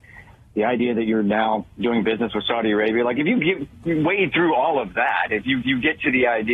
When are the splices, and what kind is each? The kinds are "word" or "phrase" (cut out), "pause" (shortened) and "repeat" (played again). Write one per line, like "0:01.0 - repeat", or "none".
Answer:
0:05.6 - repeat